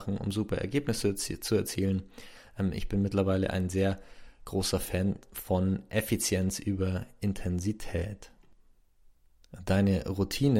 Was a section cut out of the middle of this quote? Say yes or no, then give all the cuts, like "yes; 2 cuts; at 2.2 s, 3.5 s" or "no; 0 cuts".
no; 0 cuts